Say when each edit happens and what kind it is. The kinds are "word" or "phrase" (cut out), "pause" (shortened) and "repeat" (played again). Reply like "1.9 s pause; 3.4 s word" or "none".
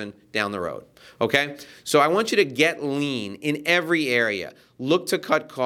none